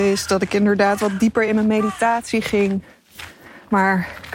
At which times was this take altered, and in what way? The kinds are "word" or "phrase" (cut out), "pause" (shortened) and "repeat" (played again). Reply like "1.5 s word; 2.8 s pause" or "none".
none